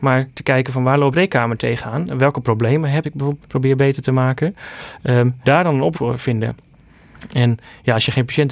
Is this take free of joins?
no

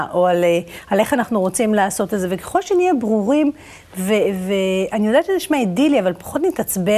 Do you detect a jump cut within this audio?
no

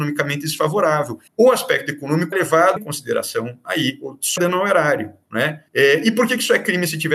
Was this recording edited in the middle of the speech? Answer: yes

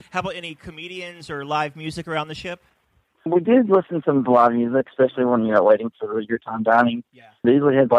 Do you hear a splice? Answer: no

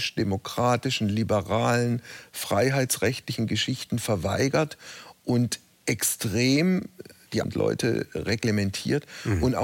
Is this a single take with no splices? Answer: no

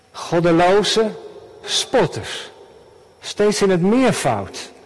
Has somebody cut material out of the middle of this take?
yes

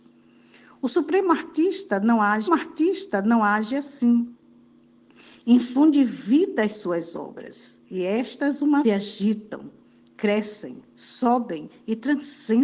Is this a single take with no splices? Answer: no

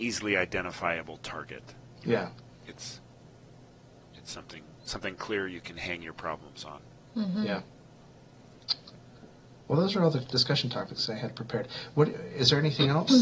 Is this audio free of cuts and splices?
yes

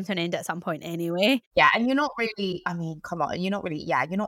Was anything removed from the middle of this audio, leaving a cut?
no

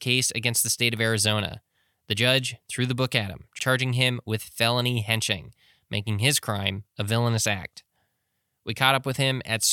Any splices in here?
no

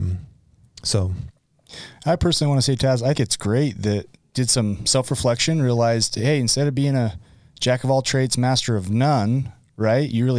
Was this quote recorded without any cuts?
no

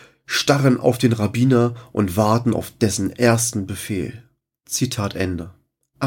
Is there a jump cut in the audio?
no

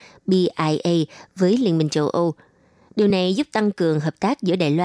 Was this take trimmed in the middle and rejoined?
no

